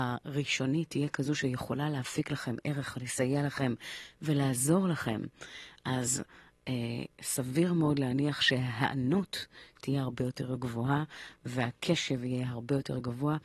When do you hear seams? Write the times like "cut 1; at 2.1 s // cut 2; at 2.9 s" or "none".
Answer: none